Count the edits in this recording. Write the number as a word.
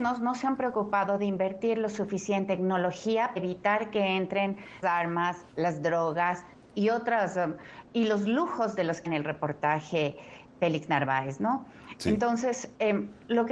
four